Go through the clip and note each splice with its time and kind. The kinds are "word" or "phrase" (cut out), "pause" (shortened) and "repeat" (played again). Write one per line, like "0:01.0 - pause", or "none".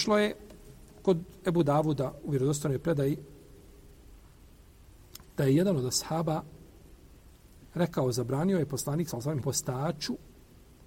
0:09.4 - word